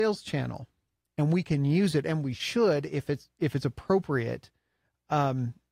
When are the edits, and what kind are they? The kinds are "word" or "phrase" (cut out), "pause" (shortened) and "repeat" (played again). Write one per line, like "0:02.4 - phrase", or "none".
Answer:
none